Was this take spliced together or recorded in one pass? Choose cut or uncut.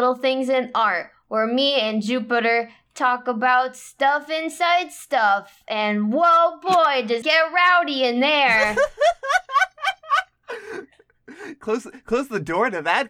cut